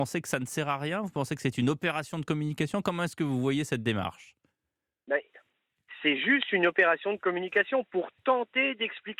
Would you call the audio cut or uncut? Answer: uncut